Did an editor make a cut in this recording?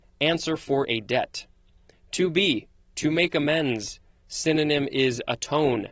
no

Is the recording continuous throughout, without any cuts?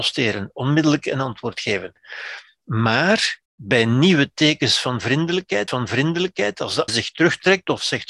no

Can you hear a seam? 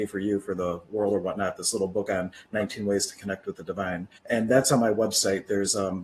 yes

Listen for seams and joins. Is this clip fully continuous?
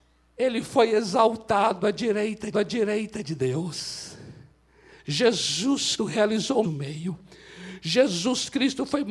no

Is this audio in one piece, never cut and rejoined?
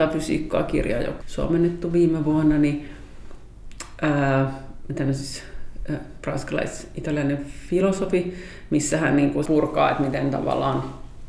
no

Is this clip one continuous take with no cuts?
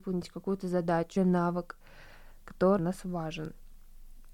no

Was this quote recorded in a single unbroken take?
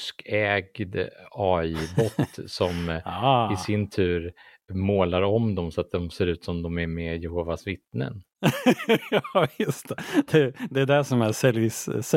yes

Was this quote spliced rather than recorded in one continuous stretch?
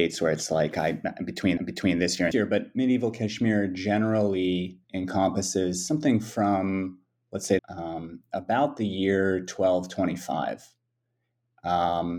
yes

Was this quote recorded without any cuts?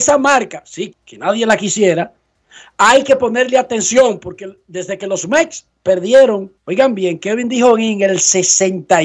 no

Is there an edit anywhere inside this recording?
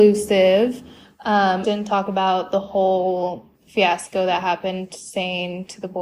yes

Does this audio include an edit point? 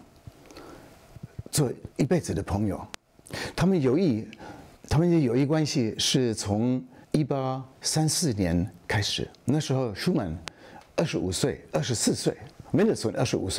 yes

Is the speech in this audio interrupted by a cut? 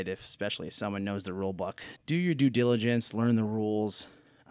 yes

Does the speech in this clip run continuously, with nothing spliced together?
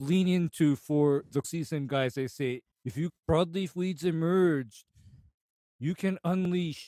no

